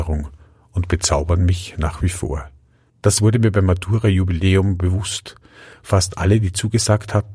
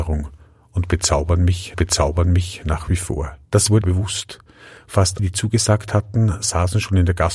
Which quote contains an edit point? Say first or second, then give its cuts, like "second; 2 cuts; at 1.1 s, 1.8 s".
second; 4 cuts; at 1.7 s, 3.4 s, 3.8 s, 5.2 s